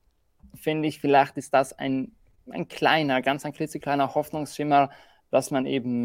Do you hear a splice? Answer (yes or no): no